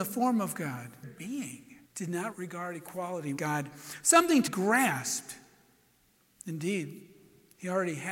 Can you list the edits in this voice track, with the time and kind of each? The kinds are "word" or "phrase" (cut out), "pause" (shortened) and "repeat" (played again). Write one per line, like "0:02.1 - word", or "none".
0:01.0 - phrase
0:01.8 - pause
0:02.3 - word
0:03.4 - word
0:04.5 - word